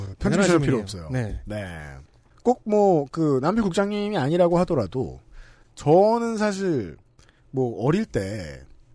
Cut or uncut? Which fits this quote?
uncut